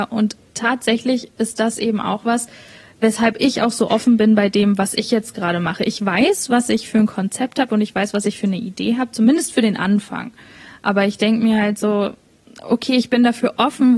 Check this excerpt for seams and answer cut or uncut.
uncut